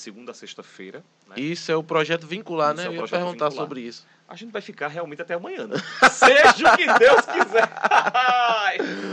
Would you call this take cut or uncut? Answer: uncut